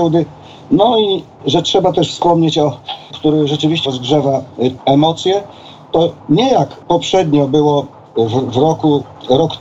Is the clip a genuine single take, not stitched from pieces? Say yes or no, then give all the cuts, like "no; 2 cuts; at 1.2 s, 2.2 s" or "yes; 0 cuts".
no; 6 cuts; at 1.4 s, 3.1 s, 3.9 s, 4.8 s, 6.2 s, 6.8 s